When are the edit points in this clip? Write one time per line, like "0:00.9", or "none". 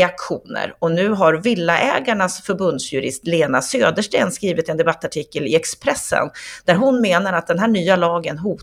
none